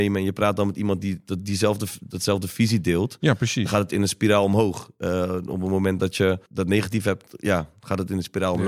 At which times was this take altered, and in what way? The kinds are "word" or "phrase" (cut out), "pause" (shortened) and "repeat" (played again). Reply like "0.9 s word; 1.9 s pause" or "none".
6.5 s pause